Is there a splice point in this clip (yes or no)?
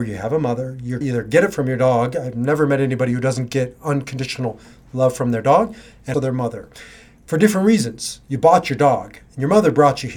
yes